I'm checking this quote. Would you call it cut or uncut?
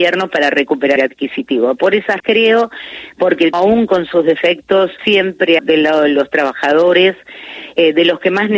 cut